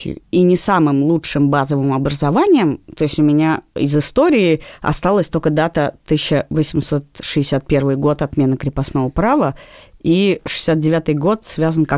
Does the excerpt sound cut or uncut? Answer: uncut